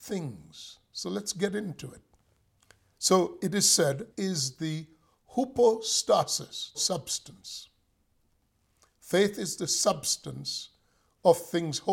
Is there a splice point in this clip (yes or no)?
yes